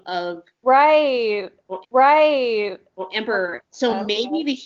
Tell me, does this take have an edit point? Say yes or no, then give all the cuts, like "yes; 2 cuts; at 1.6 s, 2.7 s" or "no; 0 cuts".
yes; 1 cut; at 1.8 s